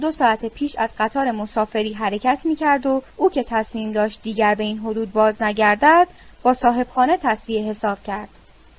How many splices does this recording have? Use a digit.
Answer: 1